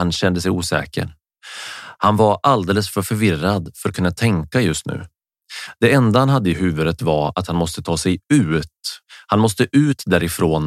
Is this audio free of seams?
yes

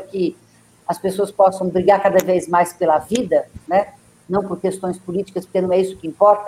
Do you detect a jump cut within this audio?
no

